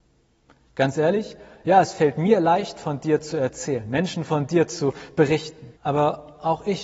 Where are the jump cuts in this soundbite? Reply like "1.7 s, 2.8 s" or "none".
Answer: 5.8 s